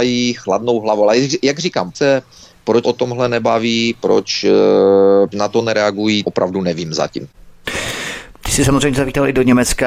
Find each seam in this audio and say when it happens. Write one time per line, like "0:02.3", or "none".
0:01.9
0:02.8
0:05.3
0:06.2